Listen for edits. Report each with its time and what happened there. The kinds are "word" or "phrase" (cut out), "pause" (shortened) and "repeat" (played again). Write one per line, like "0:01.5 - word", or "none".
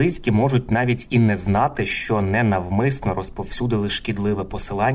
none